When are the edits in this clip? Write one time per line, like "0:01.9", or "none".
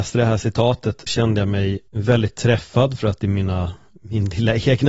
0:01.1
0:01.9
0:03.2